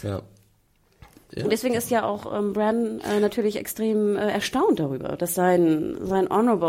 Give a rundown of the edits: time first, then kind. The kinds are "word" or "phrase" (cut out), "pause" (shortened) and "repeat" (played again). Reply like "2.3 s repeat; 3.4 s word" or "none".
none

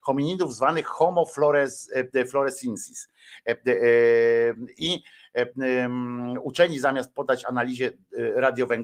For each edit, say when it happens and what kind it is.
none

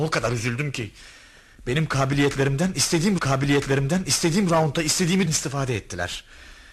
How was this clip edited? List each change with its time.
3.2 s repeat; 5.3 s word

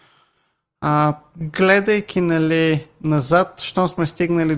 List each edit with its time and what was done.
none

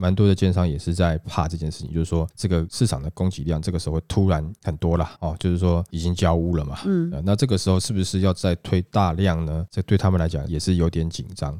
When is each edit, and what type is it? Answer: 5.2 s pause

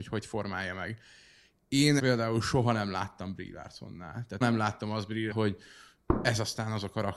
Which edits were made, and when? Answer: 2.0 s word; 4.4 s word; 5.3 s word

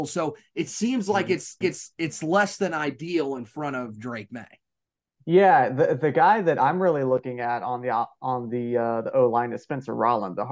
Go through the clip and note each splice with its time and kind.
1.6 s repeat

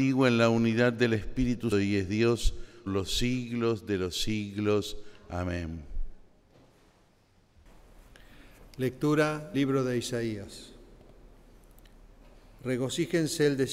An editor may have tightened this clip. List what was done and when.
1.7 s word; 2.9 s word; 9.5 s word

